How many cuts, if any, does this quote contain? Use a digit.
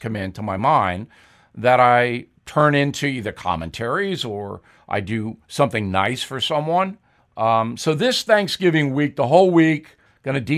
1